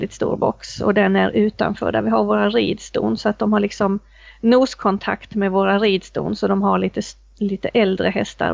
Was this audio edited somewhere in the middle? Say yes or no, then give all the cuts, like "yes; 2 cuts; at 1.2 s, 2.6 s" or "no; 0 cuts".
no; 0 cuts